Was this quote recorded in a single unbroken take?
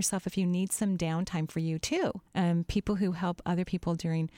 no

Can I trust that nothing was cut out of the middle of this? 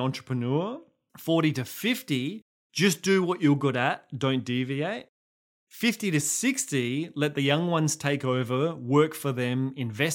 yes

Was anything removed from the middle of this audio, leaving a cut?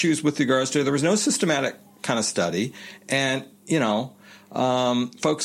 no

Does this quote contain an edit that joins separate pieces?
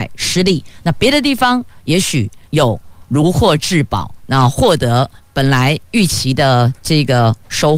yes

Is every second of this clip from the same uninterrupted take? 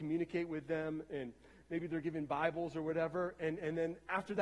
yes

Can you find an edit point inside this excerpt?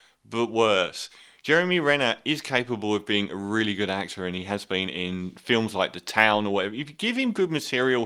no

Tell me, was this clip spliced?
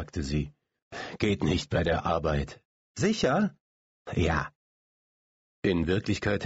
no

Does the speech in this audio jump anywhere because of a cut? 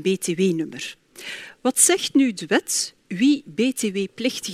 no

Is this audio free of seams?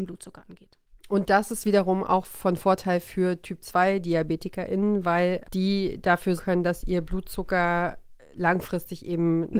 no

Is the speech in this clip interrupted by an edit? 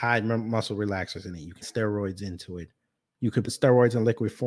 yes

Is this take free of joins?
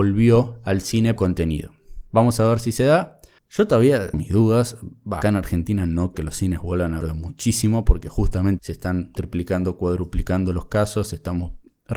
no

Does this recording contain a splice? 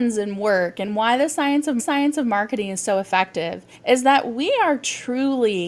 yes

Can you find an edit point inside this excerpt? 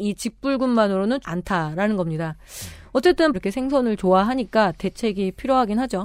yes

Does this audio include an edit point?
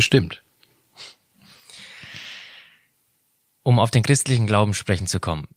no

